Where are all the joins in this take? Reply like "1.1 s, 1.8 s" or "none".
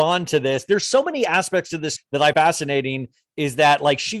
2.0 s, 2.3 s